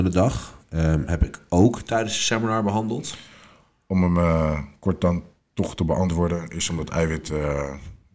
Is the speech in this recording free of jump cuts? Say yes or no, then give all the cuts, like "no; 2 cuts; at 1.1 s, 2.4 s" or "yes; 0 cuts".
yes; 0 cuts